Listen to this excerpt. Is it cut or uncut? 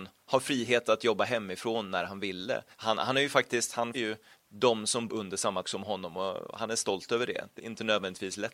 cut